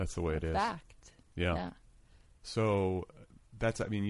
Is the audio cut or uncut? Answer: uncut